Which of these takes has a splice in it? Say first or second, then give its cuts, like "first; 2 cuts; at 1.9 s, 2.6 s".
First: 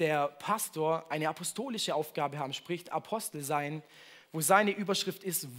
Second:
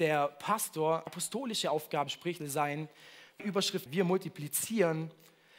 second; 5 cuts; at 1.1 s, 2.1 s, 2.4 s, 3.4 s, 3.9 s